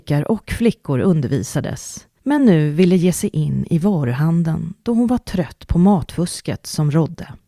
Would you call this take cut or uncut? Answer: uncut